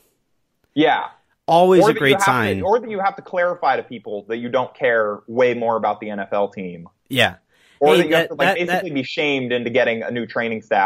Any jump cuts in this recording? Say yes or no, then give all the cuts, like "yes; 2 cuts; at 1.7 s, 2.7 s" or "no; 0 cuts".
no; 0 cuts